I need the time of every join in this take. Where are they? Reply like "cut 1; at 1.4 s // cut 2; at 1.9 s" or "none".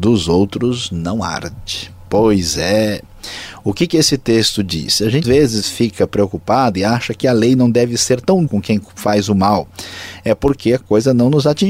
cut 1; at 5.2 s // cut 2; at 8.5 s